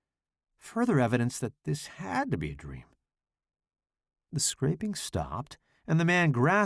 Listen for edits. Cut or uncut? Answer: uncut